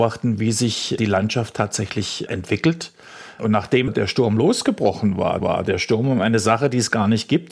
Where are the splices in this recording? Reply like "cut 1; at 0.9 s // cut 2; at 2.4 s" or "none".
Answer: cut 1; at 5.4 s